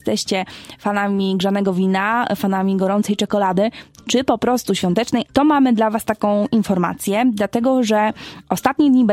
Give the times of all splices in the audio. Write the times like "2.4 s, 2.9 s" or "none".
5.3 s